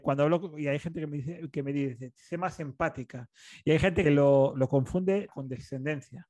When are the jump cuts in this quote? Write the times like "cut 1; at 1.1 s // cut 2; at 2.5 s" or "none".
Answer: cut 1; at 4.0 s // cut 2; at 5.3 s